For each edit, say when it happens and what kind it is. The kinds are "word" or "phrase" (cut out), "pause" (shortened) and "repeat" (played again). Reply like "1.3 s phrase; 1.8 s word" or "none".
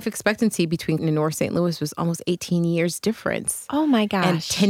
1.0 s word